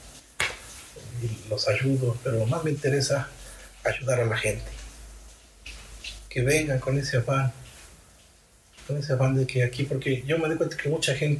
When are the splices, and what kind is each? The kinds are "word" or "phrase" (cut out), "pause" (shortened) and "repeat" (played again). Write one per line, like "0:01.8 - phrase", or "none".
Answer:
none